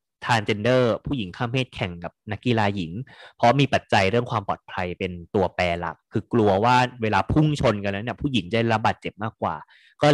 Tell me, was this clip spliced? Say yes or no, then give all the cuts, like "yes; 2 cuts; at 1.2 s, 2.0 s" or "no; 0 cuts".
no; 0 cuts